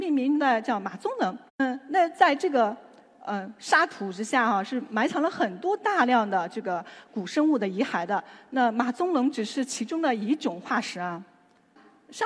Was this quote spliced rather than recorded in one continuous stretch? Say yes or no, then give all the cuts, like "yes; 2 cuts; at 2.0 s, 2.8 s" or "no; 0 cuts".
yes; 1 cut; at 1.5 s